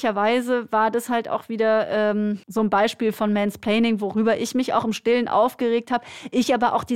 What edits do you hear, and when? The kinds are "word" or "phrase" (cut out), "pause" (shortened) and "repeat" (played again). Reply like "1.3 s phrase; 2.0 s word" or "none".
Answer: 2.4 s pause